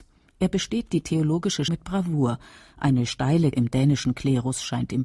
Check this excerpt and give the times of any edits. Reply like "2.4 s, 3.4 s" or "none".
1.7 s, 3.5 s